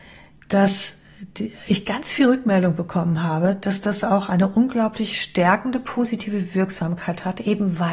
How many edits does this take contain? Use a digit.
0